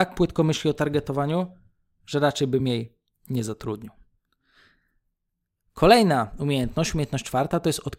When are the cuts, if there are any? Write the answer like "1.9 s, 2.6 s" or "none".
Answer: none